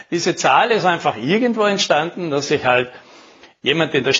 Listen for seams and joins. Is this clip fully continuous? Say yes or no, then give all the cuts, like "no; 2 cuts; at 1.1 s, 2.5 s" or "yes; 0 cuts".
yes; 0 cuts